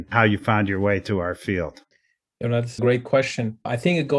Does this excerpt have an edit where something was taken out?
yes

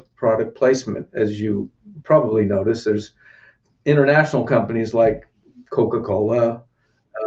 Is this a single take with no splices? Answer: yes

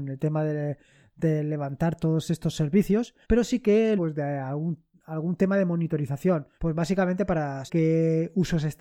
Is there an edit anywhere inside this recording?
yes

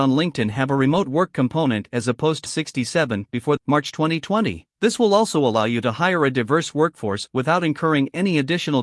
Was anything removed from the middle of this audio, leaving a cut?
yes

